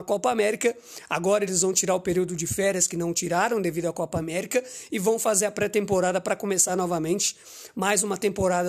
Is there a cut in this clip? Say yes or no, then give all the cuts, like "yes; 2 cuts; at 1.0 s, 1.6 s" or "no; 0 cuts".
no; 0 cuts